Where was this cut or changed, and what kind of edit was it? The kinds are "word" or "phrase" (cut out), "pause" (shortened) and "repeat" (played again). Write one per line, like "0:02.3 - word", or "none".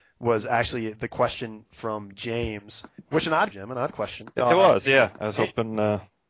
0:03.1 - pause
0:03.5 - phrase